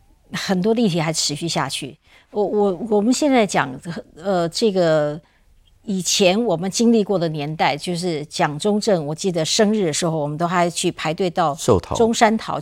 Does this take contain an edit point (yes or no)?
no